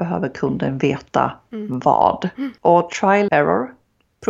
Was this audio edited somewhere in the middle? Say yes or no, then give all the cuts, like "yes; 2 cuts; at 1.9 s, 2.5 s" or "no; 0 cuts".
yes; 2 cuts; at 2.6 s, 3.3 s